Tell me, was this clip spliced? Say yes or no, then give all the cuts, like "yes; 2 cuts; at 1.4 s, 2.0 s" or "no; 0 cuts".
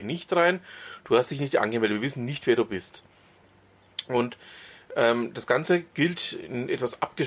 no; 0 cuts